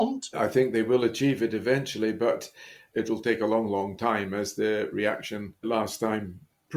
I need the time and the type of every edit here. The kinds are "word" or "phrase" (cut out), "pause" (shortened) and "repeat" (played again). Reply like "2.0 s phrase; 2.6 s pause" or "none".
none